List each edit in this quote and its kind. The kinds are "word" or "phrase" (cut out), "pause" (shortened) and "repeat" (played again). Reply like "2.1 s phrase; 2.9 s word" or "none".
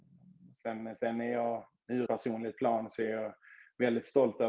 2.1 s word